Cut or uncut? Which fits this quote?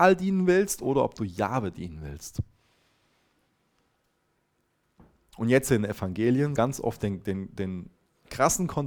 cut